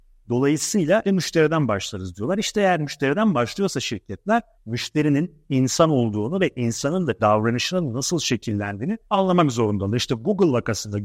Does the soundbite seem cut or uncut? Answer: cut